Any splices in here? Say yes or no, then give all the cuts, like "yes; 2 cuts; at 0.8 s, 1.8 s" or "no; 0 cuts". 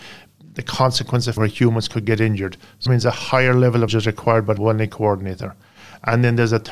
yes; 4 cuts; at 1.4 s, 2.9 s, 3.9 s, 4.6 s